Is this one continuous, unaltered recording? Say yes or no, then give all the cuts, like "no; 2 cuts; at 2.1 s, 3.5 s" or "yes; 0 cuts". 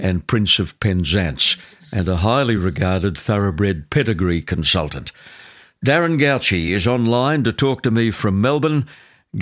yes; 0 cuts